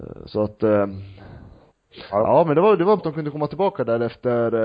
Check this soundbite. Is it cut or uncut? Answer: cut